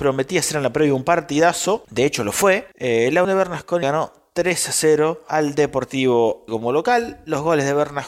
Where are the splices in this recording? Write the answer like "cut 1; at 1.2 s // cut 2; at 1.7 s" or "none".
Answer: cut 1; at 3.2 s // cut 2; at 3.8 s // cut 3; at 6.5 s

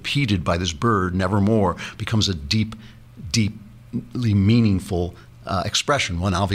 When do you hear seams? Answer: none

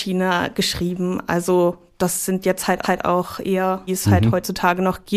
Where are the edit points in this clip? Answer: cut 1; at 2.8 s // cut 2; at 3.9 s

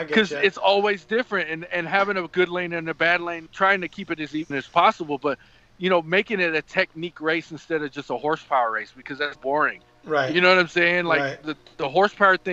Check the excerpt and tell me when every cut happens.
cut 1; at 3.5 s // cut 2; at 4.5 s // cut 3; at 9.4 s

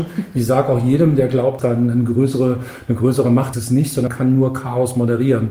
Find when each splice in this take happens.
cut 1; at 1.6 s // cut 2; at 3.5 s // cut 3; at 4.1 s

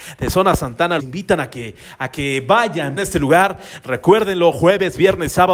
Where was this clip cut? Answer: cut 1; at 1.0 s // cut 2; at 3.0 s

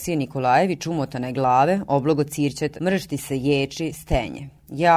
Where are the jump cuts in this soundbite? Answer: cut 1; at 2.8 s

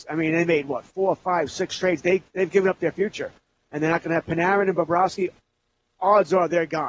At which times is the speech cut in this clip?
none

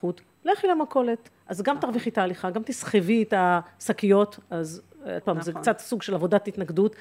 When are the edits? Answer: cut 1; at 5.2 s

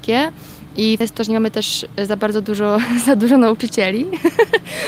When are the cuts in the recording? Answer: cut 1; at 1.0 s

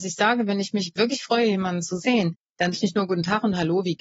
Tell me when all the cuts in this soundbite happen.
cut 1; at 2.7 s

